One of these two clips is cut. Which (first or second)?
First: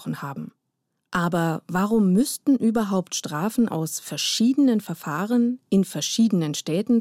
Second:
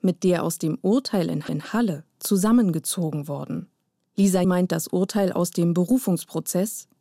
second